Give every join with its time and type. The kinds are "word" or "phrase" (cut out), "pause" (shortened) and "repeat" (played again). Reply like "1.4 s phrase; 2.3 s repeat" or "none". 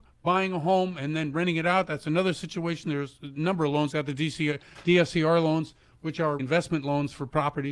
3.9 s word; 6.4 s word